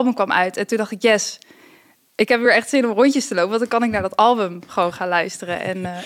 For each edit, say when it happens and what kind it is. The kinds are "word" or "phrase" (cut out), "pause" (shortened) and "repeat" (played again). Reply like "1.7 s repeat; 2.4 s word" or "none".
none